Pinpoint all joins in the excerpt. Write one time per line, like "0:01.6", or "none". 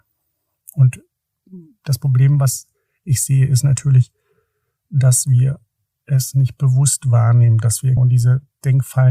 0:08.0